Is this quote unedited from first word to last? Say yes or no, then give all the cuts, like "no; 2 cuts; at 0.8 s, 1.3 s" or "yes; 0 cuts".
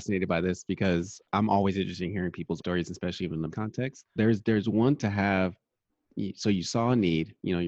no; 5 cuts; at 1.2 s, 2.6 s, 3.5 s, 4.2 s, 5.0 s